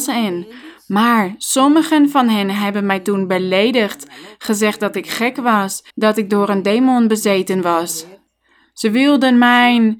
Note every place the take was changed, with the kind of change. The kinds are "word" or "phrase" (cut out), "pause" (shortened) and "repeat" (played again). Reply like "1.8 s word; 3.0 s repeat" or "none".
5.9 s pause